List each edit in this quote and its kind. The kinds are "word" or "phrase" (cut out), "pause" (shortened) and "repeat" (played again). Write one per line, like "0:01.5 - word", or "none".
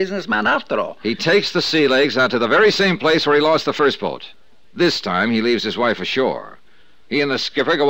none